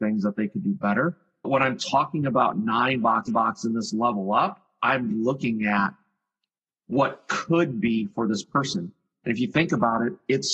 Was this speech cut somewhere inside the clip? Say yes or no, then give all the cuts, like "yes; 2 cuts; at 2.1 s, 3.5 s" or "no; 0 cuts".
yes; 3 cuts; at 1.4 s, 3.3 s, 5.1 s